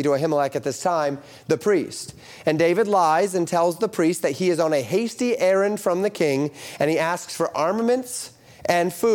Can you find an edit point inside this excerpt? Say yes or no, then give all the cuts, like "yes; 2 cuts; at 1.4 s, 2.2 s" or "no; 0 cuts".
no; 0 cuts